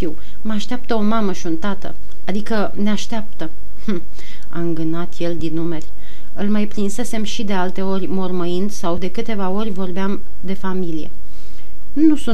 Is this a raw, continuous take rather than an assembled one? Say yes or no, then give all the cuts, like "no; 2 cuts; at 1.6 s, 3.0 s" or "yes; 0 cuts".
no; 2 cuts; at 5.4 s, 9.0 s